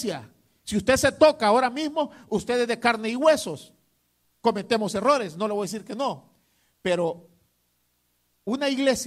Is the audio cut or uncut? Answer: uncut